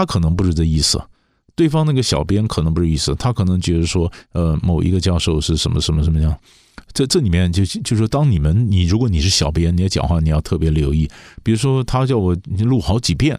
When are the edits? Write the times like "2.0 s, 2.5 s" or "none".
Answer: none